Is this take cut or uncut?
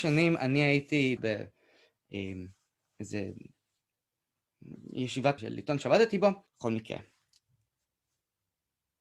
cut